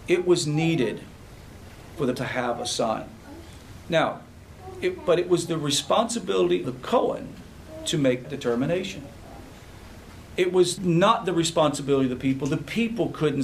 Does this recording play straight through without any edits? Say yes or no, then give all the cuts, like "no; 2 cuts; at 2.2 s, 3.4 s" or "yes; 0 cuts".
no; 4 cuts; at 2.2 s, 6.6 s, 8.2 s, 10.8 s